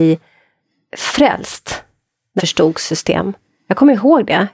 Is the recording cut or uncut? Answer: cut